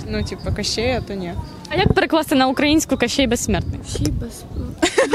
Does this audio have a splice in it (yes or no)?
no